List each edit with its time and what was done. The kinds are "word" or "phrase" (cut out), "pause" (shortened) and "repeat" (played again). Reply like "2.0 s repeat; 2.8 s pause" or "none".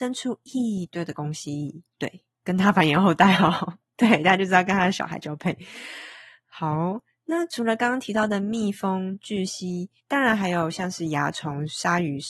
1.9 s pause; 10.0 s pause